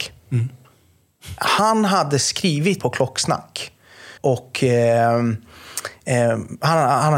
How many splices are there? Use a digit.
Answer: 2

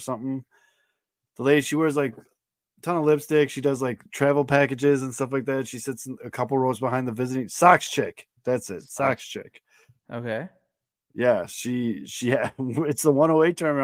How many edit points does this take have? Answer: 0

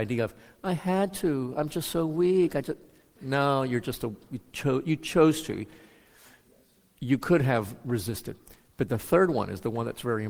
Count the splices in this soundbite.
0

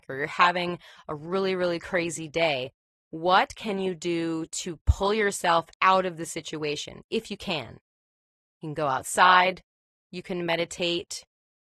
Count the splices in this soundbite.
0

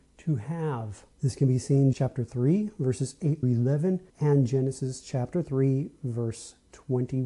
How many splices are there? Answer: 4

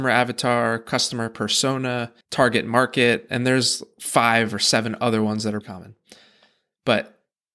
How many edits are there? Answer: 2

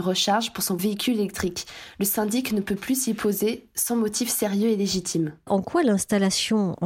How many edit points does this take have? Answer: 0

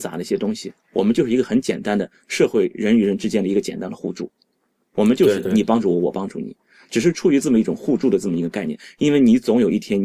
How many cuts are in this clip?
0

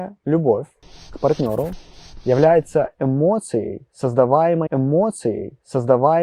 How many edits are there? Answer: 1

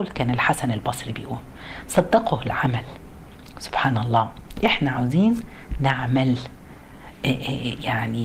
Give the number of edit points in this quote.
0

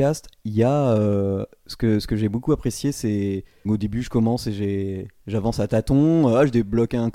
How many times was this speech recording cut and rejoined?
1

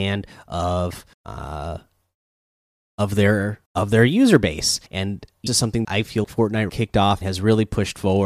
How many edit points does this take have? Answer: 8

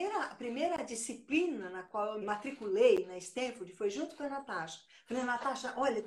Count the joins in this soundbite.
1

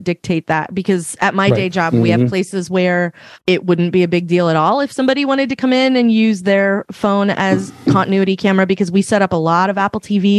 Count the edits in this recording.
1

